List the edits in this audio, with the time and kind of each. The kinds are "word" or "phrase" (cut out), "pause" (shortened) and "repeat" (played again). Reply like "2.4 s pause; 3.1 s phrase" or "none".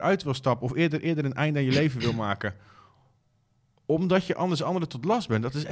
none